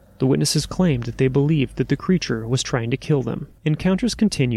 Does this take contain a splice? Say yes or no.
yes